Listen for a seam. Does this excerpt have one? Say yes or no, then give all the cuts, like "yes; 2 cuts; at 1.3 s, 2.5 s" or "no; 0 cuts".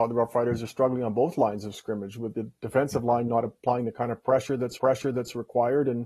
yes; 1 cut; at 4.8 s